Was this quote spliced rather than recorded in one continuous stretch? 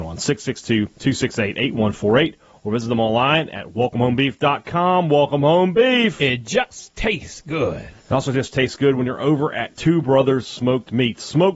yes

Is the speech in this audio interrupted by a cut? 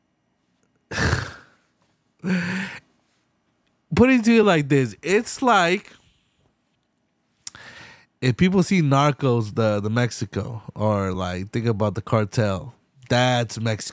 no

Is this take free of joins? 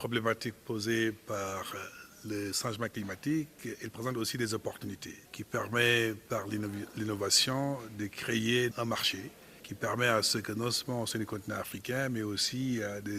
no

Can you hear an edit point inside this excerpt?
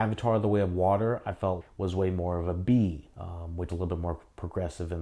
yes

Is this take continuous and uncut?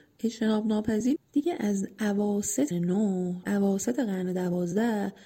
no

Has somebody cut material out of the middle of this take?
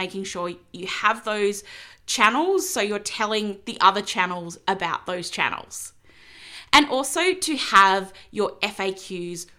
no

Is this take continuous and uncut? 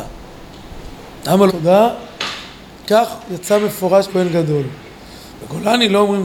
no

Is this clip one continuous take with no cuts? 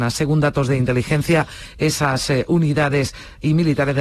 yes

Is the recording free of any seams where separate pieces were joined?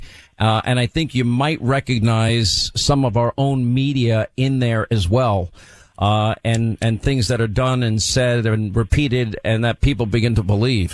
yes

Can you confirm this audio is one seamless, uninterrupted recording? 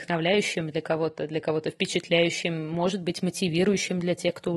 yes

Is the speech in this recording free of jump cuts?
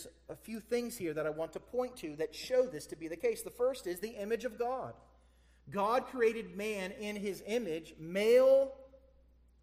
yes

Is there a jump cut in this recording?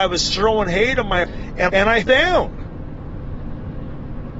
yes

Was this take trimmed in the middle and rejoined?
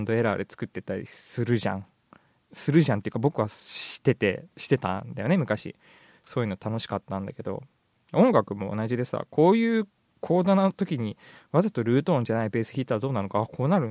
no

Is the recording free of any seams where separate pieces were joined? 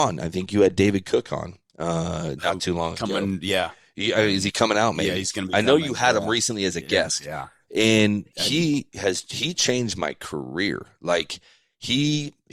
yes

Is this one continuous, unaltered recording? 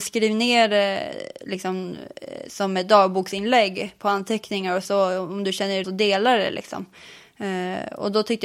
no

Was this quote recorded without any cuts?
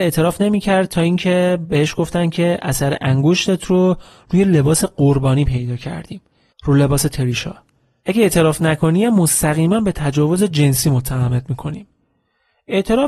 yes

